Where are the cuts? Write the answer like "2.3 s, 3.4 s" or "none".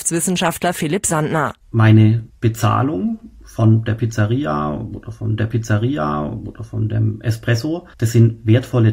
5.4 s, 7.9 s